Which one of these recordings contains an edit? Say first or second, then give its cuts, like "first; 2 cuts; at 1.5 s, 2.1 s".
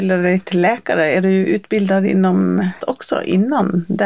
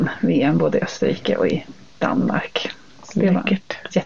first; 1 cut; at 2.8 s